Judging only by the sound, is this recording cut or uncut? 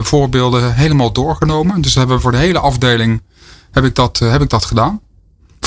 uncut